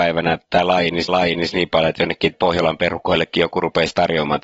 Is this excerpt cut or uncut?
cut